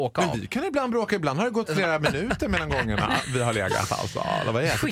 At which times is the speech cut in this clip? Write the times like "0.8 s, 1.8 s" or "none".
none